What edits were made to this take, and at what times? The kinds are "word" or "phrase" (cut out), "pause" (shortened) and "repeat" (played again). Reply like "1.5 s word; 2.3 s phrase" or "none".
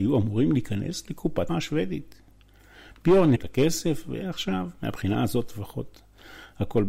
1.5 s word; 3.4 s word